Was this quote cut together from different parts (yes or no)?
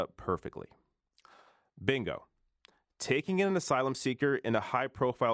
no